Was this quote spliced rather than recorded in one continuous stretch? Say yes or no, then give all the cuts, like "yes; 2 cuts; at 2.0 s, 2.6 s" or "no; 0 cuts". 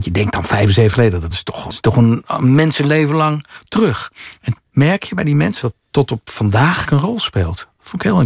yes; 6 cuts; at 0.9 s, 1.3 s, 1.7 s, 4.6 s, 5.6 s, 6.8 s